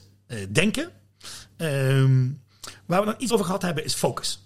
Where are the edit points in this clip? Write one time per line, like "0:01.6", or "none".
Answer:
0:03.3